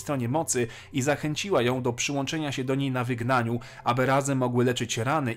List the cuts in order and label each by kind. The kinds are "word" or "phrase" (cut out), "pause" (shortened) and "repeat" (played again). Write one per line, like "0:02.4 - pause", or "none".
none